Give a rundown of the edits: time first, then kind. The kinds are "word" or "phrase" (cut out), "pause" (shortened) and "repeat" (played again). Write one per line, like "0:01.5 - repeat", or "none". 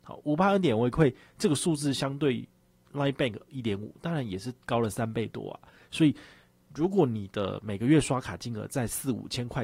none